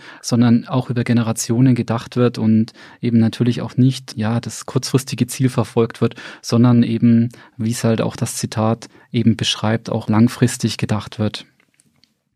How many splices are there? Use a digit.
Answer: 0